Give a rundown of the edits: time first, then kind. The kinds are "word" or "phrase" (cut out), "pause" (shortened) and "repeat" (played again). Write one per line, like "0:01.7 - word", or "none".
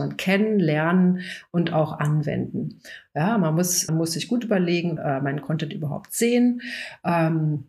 0:03.9 - word
0:05.0 - phrase